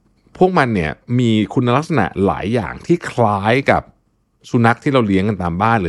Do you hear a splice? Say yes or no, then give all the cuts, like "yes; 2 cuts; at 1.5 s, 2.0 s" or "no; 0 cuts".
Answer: no; 0 cuts